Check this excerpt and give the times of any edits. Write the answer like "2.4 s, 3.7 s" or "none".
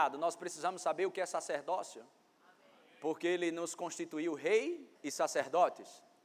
5.0 s